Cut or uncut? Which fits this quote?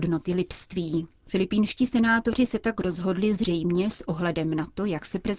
cut